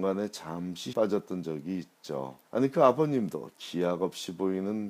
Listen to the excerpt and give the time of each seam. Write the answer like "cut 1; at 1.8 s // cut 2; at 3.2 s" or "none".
cut 1; at 0.9 s // cut 2; at 2.4 s